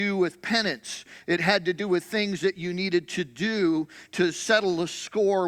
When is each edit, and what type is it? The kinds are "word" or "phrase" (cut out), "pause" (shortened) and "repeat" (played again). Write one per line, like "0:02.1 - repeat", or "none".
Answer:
none